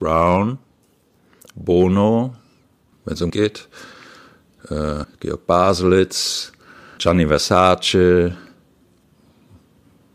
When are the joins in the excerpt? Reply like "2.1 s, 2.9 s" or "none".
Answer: 2.9 s, 3.3 s, 5.0 s, 7.0 s

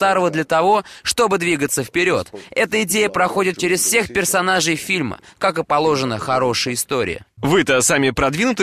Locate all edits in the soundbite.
none

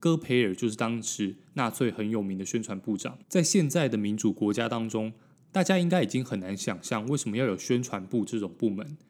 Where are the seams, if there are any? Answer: 3.2 s

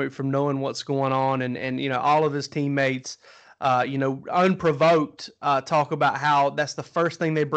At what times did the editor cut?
none

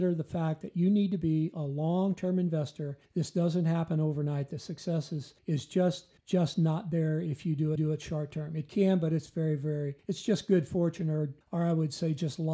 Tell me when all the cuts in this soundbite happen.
3.0 s, 5.4 s, 6.2 s, 7.8 s, 10.0 s, 11.4 s

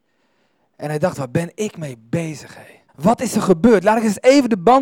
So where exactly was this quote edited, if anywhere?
2.9 s

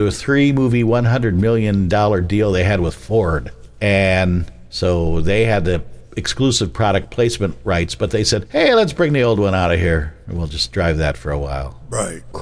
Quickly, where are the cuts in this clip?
none

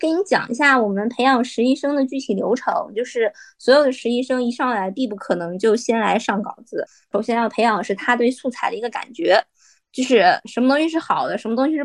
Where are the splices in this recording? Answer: none

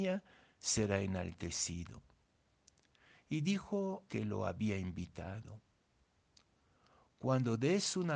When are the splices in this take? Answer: 4.1 s

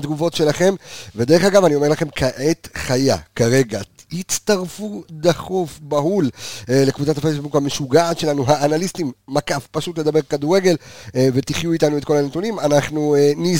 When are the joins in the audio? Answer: none

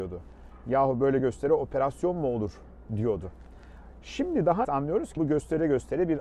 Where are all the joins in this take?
1.2 s, 4.6 s, 5.2 s

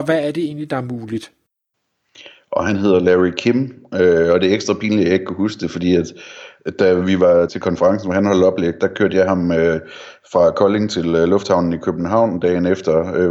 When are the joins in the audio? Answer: 7.5 s

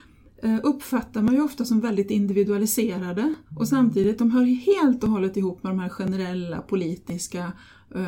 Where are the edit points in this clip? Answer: 3.4 s

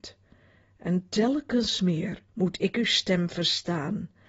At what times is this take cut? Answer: 2.3 s

